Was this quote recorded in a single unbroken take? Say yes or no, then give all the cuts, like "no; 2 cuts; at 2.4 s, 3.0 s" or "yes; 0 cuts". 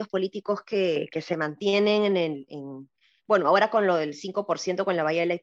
yes; 0 cuts